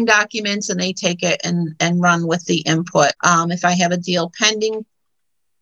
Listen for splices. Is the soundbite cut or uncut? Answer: cut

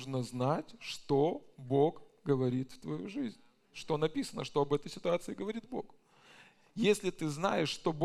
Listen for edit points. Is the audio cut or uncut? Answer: uncut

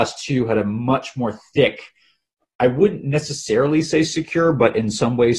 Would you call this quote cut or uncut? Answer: uncut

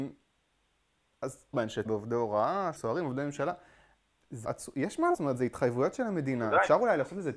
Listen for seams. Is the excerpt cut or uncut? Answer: cut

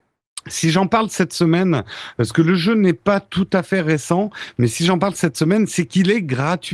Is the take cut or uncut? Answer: uncut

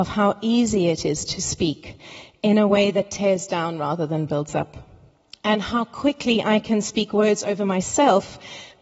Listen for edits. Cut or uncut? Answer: uncut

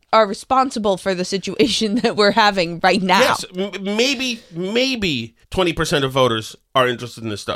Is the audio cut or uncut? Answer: cut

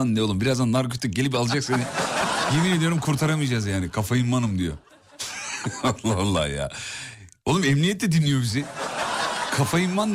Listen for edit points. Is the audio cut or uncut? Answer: uncut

